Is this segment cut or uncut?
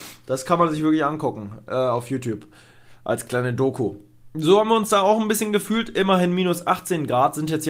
uncut